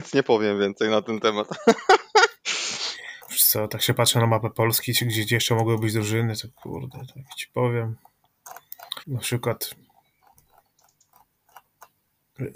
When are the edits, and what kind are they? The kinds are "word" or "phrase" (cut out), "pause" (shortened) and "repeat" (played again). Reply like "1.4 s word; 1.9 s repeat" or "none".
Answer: 3.2 s pause; 9.0 s pause